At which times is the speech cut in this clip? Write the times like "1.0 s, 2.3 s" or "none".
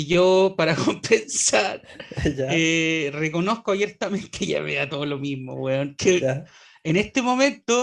none